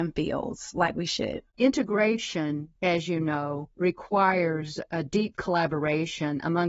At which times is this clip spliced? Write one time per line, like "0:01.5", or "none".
0:02.8
0:03.7